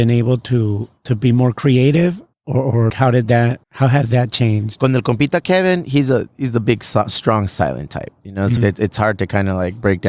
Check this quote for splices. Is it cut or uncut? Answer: cut